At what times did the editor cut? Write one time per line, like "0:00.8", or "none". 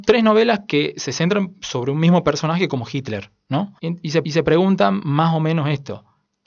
0:03.8
0:04.2